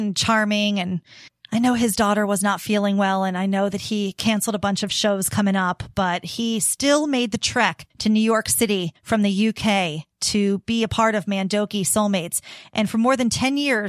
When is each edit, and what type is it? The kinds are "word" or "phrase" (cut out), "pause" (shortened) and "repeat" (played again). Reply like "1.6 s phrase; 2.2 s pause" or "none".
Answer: 1.3 s pause; 7.9 s pause; 9.0 s pause